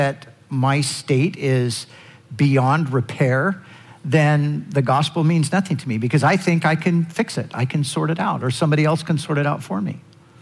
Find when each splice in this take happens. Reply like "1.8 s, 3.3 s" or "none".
none